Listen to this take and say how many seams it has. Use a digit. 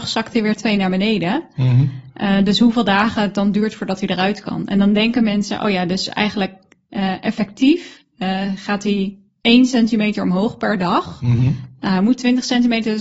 1